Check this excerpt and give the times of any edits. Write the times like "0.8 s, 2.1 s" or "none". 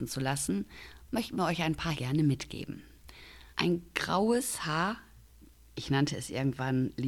1.9 s, 3.5 s